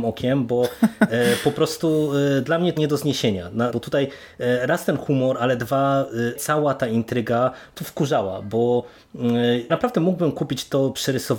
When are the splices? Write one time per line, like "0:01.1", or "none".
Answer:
0:02.8
0:03.7
0:06.4
0:07.8
0:09.7